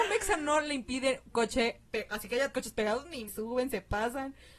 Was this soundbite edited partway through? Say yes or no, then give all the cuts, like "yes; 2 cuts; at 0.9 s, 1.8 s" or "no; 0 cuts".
yes; 3 cuts; at 1.3 s, 2.5 s, 3.3 s